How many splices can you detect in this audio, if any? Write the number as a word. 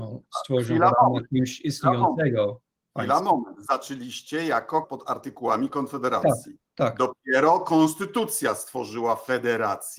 one